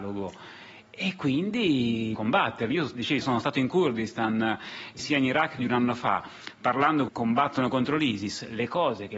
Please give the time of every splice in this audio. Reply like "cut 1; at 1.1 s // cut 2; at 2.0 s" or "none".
cut 1; at 2.2 s // cut 2; at 3.2 s // cut 3; at 5.0 s // cut 4; at 5.6 s // cut 5; at 7.1 s